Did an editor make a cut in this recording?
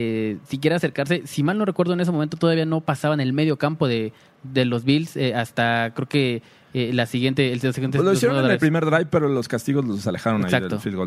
no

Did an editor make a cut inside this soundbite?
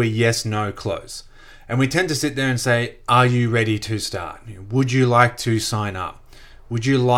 no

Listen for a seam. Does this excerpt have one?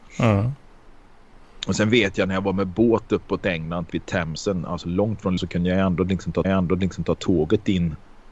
yes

